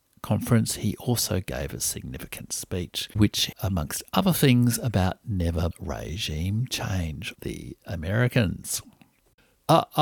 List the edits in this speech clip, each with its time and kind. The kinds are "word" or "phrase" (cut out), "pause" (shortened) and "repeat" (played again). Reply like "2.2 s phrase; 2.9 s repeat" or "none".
3.2 s word; 3.5 s phrase; 5.7 s phrase; 7.3 s phrase